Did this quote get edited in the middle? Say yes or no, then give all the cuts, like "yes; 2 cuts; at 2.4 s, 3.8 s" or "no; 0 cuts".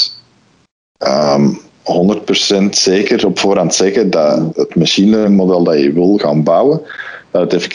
yes; 1 cut; at 4.5 s